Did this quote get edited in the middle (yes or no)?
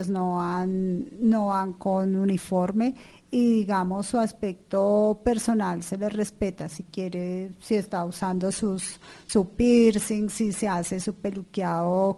no